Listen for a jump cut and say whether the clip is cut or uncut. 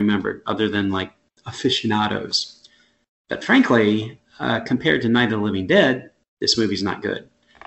uncut